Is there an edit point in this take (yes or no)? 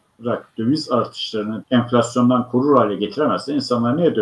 yes